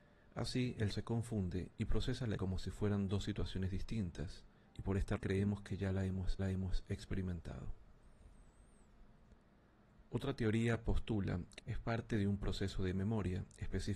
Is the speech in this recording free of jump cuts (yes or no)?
no